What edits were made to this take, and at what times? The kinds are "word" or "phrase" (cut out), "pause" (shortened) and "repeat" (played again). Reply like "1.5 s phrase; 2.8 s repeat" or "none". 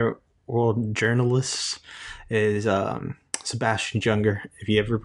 none